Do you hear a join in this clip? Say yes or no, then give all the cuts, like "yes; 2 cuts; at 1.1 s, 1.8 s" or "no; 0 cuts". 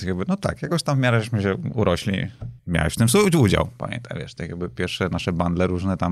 yes; 1 cut; at 2.6 s